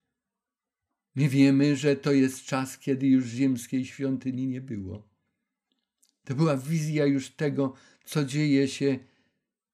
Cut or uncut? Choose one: uncut